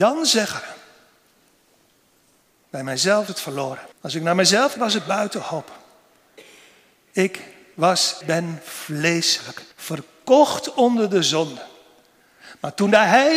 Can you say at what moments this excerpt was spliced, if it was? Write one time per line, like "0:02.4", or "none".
0:03.3
0:03.9
0:04.8
0:08.2
0:09.7